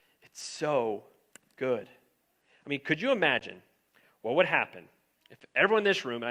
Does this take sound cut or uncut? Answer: uncut